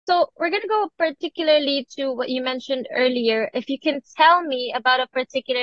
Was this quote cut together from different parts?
no; 0 cuts

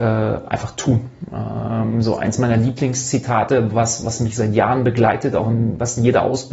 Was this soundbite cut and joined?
no; 0 cuts

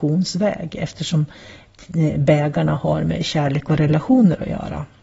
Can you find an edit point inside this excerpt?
no; 0 cuts

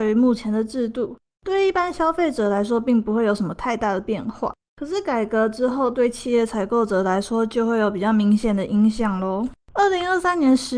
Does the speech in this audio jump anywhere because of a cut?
yes; 1 cut; at 9.6 s

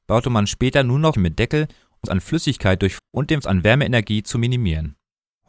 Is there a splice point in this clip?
yes; 4 cuts; at 1.1 s, 2.0 s, 3.0 s, 3.4 s

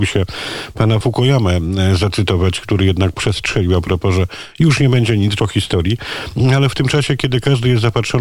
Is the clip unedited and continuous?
no; 2 cuts; at 1.0 s, 5.4 s

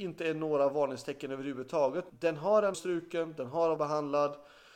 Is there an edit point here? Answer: yes; 3 cuts; at 2.1 s, 2.7 s, 3.8 s

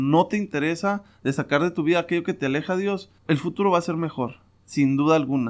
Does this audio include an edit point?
yes; 1 cut; at 3.2 s

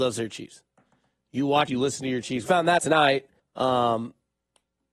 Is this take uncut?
no; 4 cuts; at 1.7 s, 2.5 s, 2.8 s, 3.4 s

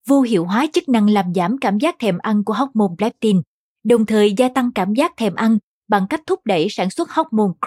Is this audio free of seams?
yes; 0 cuts

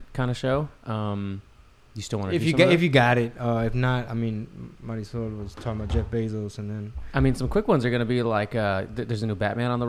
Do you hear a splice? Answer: no; 0 cuts

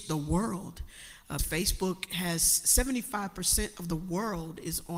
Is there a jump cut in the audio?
yes; 1 cut; at 1.4 s

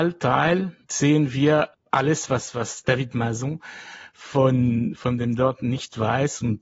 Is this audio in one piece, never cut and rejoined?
yes; 0 cuts

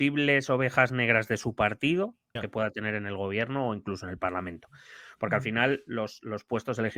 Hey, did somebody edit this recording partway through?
yes; 1 cut; at 2.4 s

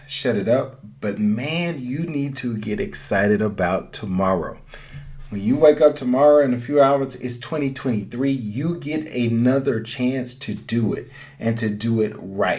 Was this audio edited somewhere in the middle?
no; 0 cuts

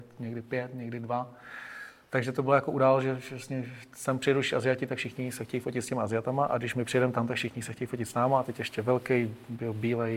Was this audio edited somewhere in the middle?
no; 0 cuts

